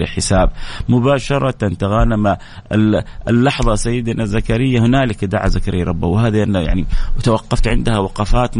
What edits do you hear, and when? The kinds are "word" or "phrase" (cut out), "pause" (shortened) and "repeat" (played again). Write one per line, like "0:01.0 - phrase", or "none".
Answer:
none